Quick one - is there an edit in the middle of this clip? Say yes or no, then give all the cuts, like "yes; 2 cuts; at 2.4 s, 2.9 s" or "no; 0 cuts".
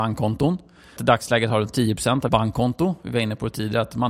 yes; 2 cuts; at 1.0 s, 2.3 s